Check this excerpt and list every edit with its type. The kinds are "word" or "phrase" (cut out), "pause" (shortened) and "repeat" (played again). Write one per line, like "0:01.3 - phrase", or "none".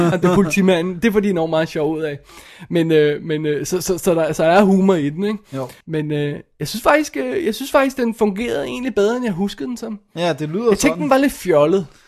0:05.8 - pause